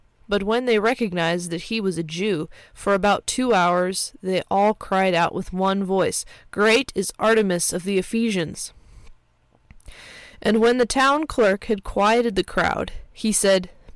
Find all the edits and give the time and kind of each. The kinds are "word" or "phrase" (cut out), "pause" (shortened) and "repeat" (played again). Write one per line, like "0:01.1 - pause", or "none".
none